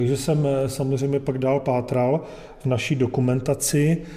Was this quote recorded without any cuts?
yes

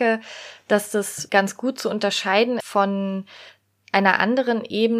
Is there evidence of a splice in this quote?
yes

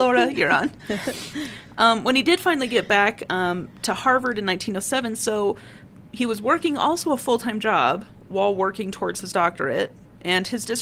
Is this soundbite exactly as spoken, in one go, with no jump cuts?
yes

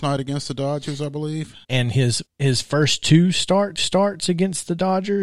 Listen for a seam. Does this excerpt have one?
yes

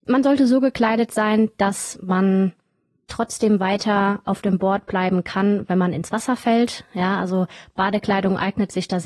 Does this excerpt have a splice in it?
no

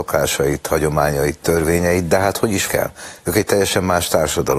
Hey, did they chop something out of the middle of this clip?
yes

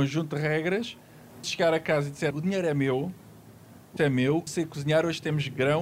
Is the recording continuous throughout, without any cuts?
no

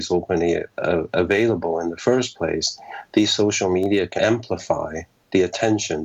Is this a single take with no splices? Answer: no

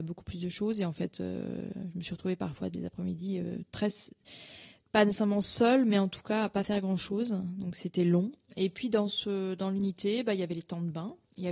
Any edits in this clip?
no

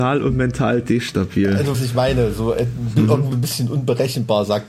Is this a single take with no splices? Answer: no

